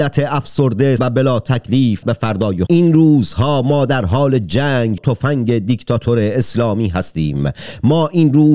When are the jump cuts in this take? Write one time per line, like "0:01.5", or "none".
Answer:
0:01.0
0:02.0
0:02.7
0:05.0